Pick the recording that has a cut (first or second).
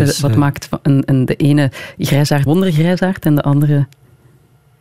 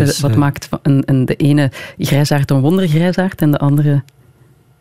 first